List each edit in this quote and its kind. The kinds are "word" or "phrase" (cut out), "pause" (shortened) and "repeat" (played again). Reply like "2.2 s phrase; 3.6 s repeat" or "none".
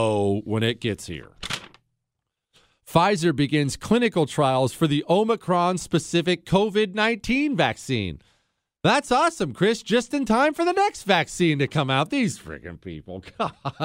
none